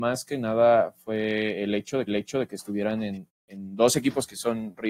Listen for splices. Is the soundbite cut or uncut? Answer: cut